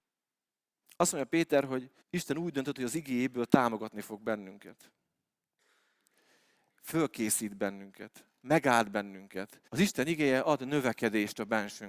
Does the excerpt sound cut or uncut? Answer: cut